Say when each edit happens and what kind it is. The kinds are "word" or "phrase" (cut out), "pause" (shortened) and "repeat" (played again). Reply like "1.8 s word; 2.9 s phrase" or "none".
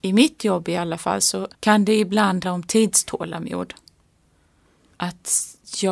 1.5 s pause; 2.4 s word